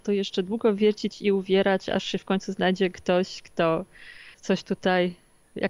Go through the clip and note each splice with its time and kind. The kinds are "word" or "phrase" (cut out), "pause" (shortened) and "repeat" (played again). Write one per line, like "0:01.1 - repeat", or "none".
0:04.3 - pause